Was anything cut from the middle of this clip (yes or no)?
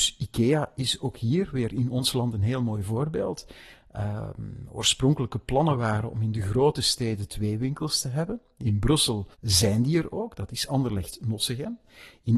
yes